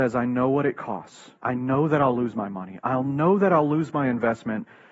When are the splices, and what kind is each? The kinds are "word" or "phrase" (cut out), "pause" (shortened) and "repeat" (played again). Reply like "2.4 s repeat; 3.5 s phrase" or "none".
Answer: 1.4 s pause